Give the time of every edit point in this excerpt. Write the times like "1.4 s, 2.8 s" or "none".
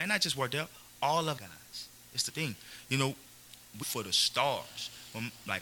1.4 s, 2.3 s, 3.8 s